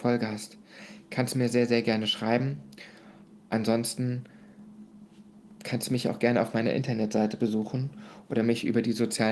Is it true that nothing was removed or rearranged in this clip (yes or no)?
yes